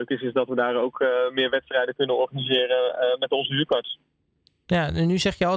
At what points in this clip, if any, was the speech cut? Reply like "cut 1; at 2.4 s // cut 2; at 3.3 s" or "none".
none